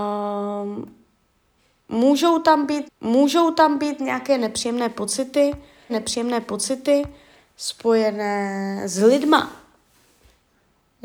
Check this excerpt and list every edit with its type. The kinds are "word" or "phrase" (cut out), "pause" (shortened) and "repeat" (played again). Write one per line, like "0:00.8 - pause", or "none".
0:02.8 - repeat
0:05.9 - repeat